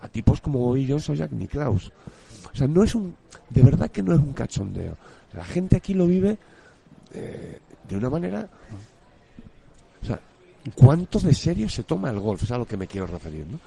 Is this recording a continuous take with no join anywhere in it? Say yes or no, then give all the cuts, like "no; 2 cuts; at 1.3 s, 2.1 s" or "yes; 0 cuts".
yes; 0 cuts